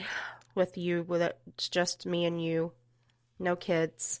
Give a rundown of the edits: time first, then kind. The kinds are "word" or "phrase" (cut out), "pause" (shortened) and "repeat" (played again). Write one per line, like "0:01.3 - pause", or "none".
none